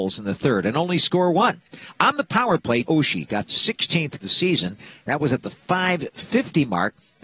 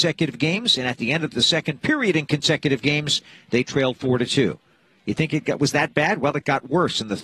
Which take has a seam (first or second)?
first